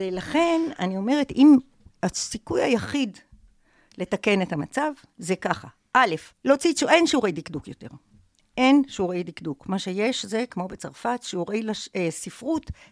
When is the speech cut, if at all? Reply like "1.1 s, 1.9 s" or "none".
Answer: 6.3 s